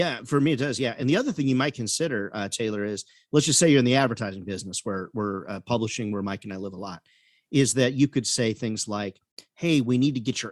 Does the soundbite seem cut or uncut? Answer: uncut